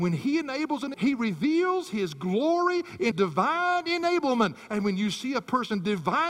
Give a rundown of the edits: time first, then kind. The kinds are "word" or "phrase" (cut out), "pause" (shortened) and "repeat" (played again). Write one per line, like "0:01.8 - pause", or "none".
0:00.9 - word
0:03.1 - word